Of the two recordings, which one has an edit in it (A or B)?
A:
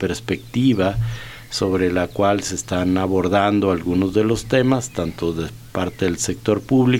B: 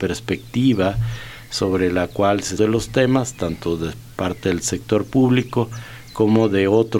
B